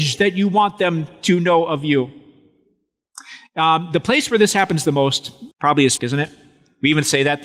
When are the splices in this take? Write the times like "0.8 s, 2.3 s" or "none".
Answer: 5.5 s, 6.0 s